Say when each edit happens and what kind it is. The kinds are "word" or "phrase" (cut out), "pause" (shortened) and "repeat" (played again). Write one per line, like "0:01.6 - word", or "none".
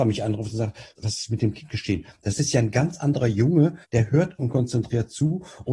0:01.0 - word
0:03.8 - pause
0:04.4 - word